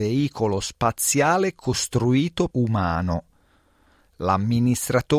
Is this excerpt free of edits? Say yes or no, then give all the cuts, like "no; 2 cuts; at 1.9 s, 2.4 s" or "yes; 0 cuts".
no; 1 cut; at 2.5 s